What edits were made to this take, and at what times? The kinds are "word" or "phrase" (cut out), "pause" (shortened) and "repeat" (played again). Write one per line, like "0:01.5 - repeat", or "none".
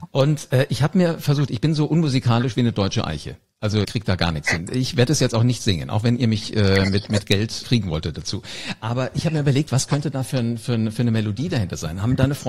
0:03.8 - word
0:07.6 - word